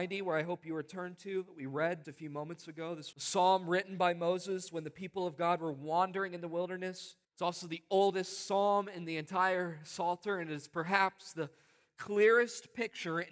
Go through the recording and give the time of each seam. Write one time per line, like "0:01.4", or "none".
0:02.0
0:03.1
0:07.2